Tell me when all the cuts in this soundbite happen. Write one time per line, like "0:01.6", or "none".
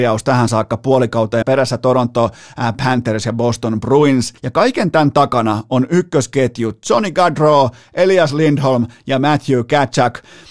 0:01.4
0:04.4